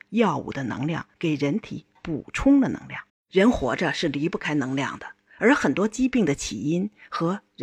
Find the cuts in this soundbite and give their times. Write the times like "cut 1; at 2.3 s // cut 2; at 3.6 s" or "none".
cut 1; at 1.1 s // cut 2; at 3.1 s